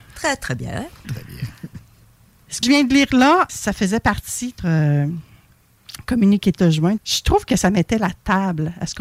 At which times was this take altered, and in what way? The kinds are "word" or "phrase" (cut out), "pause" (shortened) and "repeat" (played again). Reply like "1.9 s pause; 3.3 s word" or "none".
1.0 s word; 2.6 s word; 3.5 s word; 4.6 s word; 6.6 s word; 7.0 s word